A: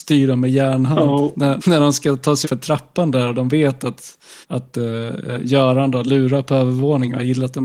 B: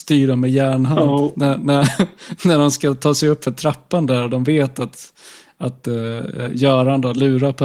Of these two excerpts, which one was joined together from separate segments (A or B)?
A